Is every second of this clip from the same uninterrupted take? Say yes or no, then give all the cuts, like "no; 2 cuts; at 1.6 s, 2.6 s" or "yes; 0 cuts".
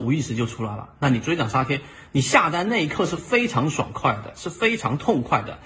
yes; 0 cuts